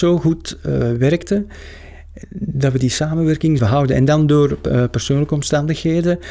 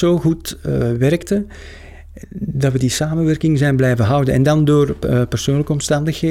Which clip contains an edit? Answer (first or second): first